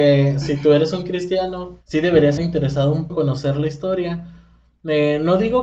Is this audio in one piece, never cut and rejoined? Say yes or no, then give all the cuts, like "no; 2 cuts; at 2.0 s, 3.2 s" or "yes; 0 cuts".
no; 3 cuts; at 1.8 s, 2.4 s, 3.1 s